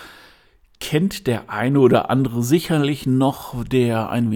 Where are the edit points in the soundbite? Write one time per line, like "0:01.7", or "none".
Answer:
none